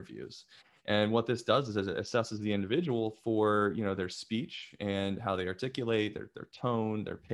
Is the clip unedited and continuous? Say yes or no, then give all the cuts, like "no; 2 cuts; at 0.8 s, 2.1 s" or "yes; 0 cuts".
yes; 0 cuts